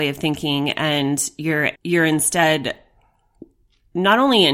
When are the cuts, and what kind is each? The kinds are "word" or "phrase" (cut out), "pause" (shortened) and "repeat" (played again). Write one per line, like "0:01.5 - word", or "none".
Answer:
0:01.8 - pause